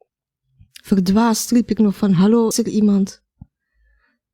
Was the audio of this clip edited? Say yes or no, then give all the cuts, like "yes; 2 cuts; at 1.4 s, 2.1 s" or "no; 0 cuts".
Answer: yes; 1 cut; at 2.5 s